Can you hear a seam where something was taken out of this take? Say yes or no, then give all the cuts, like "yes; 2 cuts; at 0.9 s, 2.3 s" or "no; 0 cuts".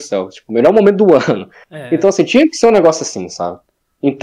no; 0 cuts